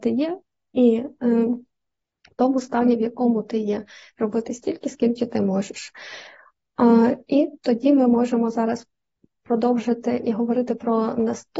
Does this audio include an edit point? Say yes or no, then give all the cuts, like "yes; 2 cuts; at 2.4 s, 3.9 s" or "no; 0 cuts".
no; 0 cuts